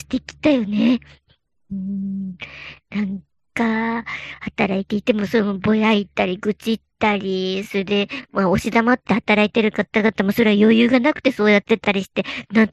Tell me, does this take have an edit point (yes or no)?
no